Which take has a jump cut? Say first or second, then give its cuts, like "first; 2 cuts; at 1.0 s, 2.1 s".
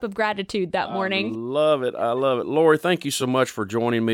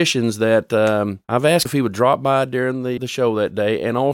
second; 3 cuts; at 1.2 s, 1.7 s, 3.0 s